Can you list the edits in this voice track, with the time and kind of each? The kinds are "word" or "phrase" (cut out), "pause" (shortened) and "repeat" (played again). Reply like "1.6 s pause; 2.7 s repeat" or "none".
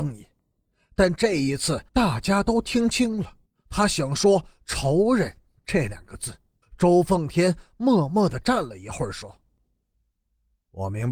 1.9 s pause; 3.5 s pause; 6.6 s pause